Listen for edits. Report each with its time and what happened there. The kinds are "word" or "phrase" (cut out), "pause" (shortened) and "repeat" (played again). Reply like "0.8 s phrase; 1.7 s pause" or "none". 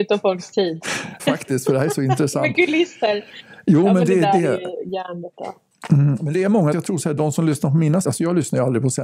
1.2 s word; 6.7 s word; 8.0 s word